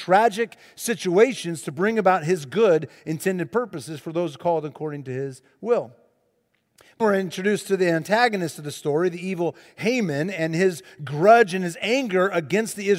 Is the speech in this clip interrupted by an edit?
yes; 1 cut; at 7.0 s

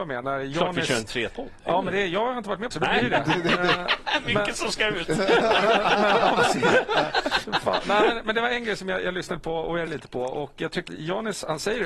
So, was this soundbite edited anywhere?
yes; 4 cuts; at 1.3 s, 2.7 s, 9.9 s, 10.9 s

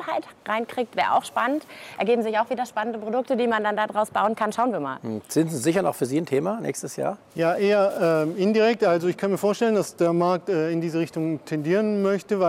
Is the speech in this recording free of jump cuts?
no; 1 cut; at 7.2 s

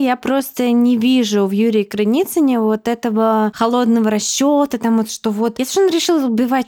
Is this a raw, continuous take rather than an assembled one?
yes; 0 cuts

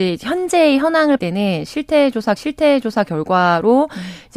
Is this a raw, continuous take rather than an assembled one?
no; 2 cuts; at 1.2 s, 2.4 s

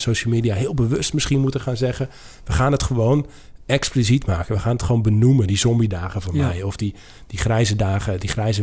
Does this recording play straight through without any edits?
yes; 0 cuts

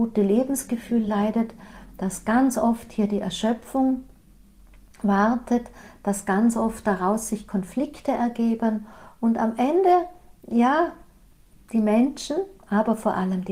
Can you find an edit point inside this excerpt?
no; 0 cuts

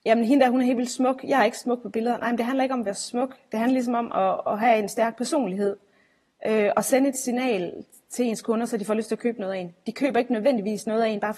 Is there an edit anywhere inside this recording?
no; 0 cuts

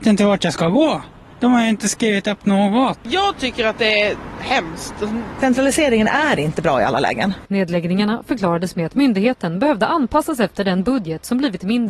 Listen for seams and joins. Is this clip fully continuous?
yes; 0 cuts

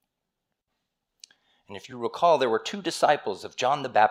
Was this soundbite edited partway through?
no; 0 cuts

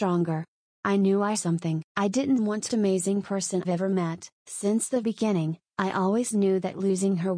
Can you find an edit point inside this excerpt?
yes; 6 cuts; at 1.3 s, 1.9 s, 2.7 s, 3.6 s, 4.4 s, 5.0 s

